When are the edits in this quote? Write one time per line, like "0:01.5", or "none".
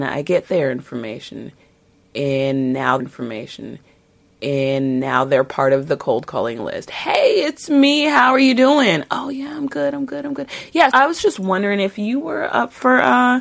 0:03.0
0:10.9